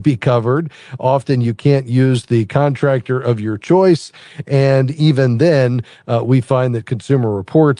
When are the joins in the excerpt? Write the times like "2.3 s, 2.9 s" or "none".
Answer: none

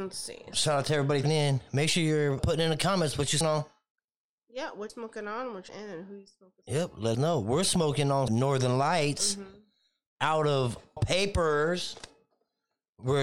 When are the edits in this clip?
1.2 s, 2.4 s, 3.4 s, 4.9 s, 5.7 s, 6.6 s, 7.1 s, 8.3 s, 11.0 s

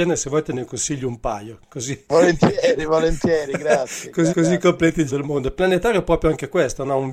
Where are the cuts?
4.3 s, 5.1 s

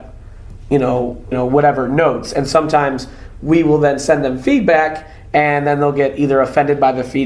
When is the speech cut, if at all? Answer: 1.3 s

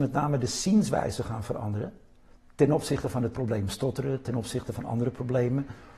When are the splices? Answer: none

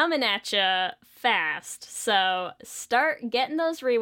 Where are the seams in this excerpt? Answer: none

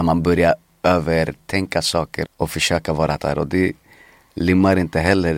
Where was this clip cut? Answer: 2.3 s, 3.2 s

